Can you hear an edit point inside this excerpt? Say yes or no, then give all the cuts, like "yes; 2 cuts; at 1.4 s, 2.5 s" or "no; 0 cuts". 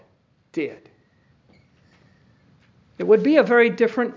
no; 0 cuts